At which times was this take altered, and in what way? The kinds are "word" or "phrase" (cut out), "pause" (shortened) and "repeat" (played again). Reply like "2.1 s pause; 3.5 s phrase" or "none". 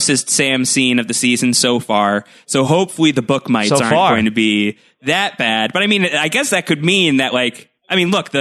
none